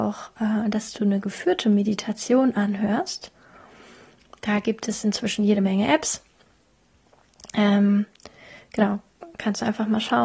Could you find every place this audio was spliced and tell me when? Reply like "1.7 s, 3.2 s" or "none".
none